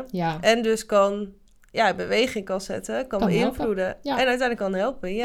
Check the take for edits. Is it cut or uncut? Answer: uncut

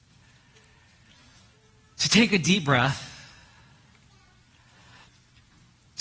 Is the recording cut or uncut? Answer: uncut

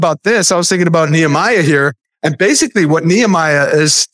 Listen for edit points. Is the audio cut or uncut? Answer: uncut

